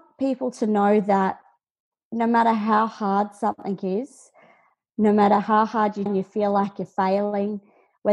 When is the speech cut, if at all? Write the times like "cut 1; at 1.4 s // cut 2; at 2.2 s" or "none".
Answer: cut 1; at 1.8 s // cut 2; at 6.1 s